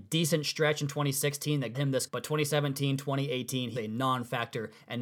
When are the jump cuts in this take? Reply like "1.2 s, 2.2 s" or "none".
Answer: 1.7 s, 2.1 s, 3.8 s